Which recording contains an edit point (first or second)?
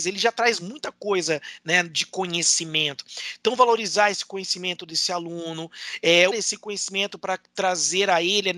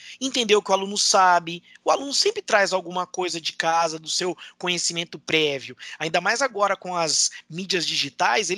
first